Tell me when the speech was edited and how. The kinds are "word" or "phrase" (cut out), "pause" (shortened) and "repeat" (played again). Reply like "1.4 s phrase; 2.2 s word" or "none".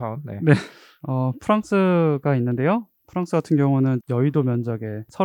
4.0 s word